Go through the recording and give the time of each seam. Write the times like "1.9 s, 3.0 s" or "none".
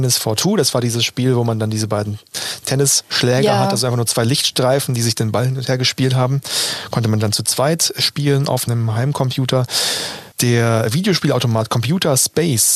10.3 s